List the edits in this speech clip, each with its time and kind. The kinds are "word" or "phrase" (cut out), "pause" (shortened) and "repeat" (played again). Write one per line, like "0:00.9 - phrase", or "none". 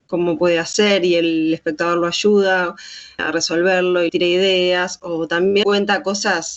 0:03.2 - word
0:04.1 - word
0:05.6 - word